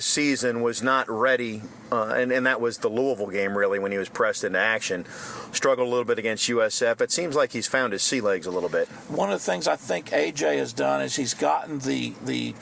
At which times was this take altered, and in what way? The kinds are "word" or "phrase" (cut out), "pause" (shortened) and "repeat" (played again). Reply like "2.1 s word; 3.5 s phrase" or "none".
none

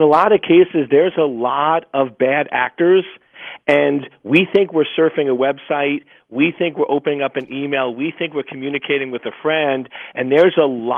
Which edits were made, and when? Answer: none

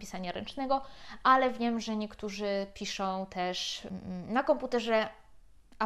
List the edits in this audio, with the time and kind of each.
none

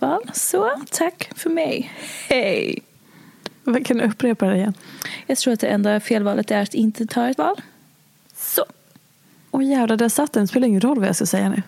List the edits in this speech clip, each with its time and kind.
7.4 s word

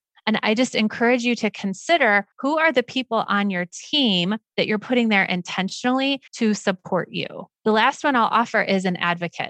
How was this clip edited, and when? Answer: 2.3 s pause; 6.3 s pause; 7.6 s pause

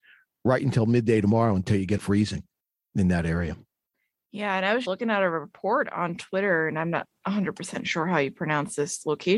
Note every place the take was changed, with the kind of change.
2.0 s word; 4.8 s word

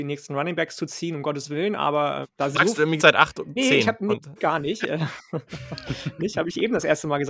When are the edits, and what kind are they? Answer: 2.2 s word; 2.5 s word; 3.0 s word; 3.6 s word; 4.4 s word; 6.2 s word

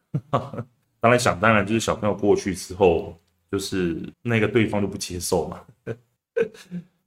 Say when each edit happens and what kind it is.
4.1 s pause

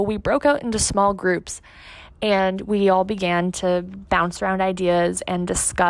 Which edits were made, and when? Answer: none

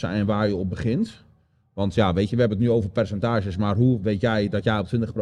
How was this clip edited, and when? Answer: none

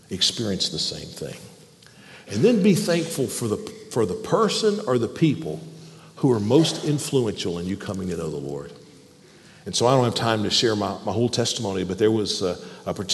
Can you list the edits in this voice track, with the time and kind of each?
none

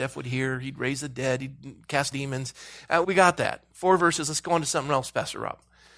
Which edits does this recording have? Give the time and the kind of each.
2.1 s word; 3.0 s word; 3.7 s pause

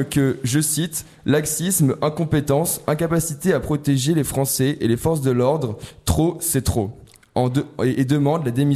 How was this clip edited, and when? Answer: none

